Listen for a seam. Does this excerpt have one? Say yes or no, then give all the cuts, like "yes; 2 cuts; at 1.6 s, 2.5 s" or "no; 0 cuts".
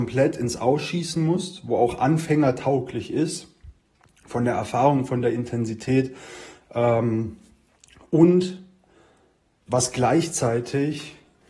no; 0 cuts